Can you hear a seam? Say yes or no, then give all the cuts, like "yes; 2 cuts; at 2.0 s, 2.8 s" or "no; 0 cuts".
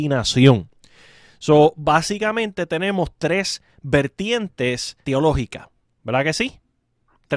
yes; 1 cut; at 5.0 s